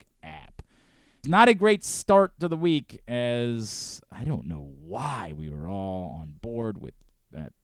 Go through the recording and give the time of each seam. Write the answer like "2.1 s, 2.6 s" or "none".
1.2 s